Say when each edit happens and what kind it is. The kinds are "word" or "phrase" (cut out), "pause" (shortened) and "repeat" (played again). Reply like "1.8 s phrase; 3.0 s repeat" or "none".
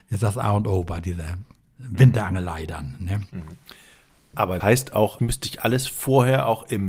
1.6 s pause; 4.6 s word; 5.2 s word